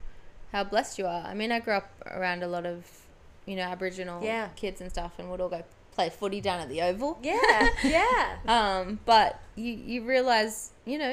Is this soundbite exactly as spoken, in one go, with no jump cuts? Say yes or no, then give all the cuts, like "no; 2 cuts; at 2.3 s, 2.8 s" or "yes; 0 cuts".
yes; 0 cuts